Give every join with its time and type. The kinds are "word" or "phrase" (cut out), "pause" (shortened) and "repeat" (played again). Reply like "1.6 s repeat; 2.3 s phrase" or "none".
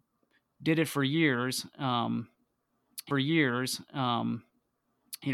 3.1 s repeat